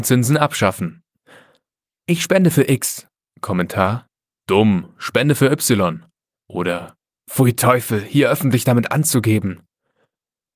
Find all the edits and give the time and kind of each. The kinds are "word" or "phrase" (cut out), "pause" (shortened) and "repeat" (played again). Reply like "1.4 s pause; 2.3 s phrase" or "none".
none